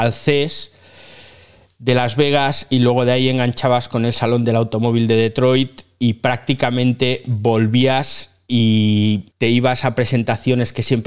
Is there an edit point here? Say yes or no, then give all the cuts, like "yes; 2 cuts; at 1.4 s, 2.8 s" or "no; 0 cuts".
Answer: yes; 1 cut; at 9.3 s